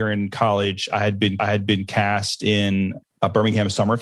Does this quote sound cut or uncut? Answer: cut